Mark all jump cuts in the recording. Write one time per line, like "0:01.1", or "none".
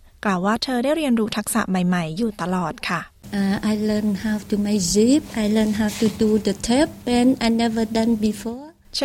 none